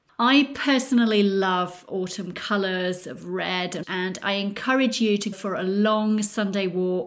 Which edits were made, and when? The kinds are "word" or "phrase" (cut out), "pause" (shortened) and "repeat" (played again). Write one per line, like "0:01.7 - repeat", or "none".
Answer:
0:03.8 - word
0:05.3 - word